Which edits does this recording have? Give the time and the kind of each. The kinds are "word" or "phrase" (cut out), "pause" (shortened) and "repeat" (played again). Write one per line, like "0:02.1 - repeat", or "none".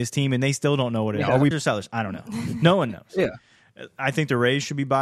0:01.5 - word